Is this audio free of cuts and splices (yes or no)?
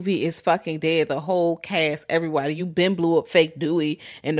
yes